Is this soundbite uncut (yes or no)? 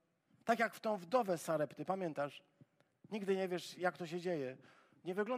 yes